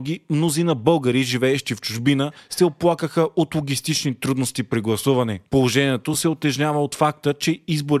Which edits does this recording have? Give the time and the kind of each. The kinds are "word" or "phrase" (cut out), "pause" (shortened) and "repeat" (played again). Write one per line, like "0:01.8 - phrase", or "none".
none